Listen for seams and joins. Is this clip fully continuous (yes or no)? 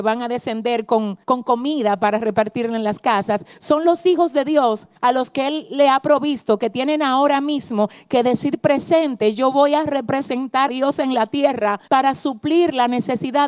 no